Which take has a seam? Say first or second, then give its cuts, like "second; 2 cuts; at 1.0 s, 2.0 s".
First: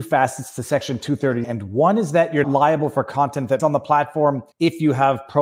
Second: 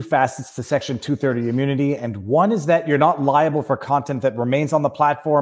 first; 4 cuts; at 1.4 s, 2.4 s, 3.6 s, 4.5 s